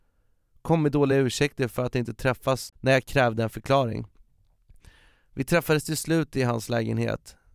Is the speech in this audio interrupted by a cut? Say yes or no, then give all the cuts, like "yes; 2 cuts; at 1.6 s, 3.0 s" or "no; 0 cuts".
no; 0 cuts